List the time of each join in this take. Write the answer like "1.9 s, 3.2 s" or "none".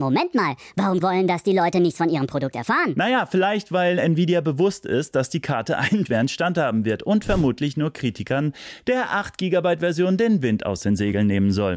1.0 s, 6.0 s